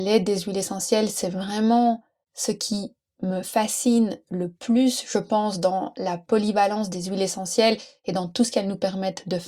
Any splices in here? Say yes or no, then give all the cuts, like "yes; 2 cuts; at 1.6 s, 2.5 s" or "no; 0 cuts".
no; 0 cuts